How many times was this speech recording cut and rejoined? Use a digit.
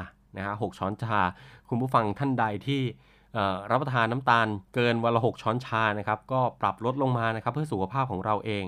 1